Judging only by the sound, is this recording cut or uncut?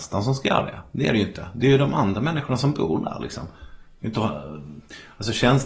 uncut